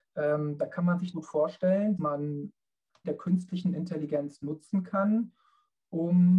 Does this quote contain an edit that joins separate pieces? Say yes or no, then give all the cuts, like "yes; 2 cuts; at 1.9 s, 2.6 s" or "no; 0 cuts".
yes; 3 cuts; at 1.1 s, 2.0 s, 3.0 s